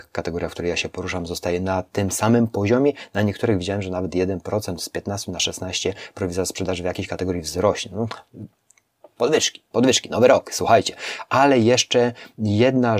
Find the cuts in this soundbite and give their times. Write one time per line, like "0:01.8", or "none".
none